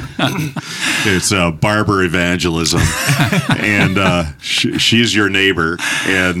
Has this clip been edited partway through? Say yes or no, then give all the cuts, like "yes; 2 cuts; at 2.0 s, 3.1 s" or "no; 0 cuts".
no; 0 cuts